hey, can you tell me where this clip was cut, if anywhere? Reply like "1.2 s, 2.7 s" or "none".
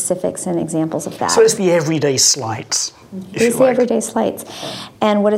none